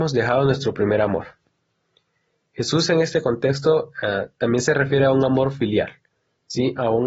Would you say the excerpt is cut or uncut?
uncut